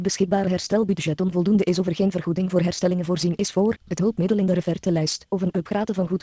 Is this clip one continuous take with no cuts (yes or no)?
no